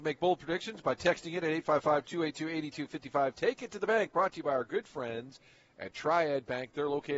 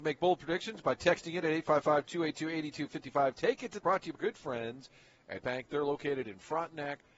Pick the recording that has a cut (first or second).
second